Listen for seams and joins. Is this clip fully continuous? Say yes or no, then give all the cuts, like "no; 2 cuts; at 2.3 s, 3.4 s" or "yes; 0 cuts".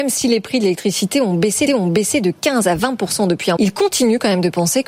no; 2 cuts; at 1.7 s, 3.6 s